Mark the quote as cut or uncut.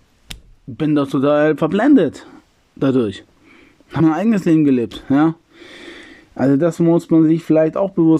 cut